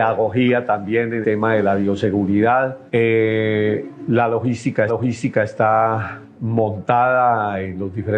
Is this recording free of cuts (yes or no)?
no